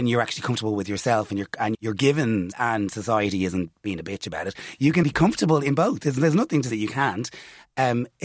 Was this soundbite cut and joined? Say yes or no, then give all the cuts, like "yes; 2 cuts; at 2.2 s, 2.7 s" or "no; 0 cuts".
yes; 4 cuts; at 1.7 s, 2.5 s, 5.0 s, 6.7 s